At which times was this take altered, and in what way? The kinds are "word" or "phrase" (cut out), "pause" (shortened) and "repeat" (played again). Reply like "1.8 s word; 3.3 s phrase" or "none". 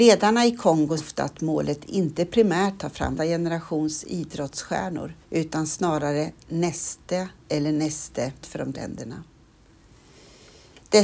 1.0 s word; 2.8 s phrase; 3.2 s word; 5.2 s pause; 7.4 s pause; 8.4 s word; 8.7 s word